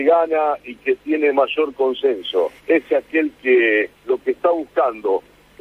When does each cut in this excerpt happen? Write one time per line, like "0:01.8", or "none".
0:02.6
0:04.0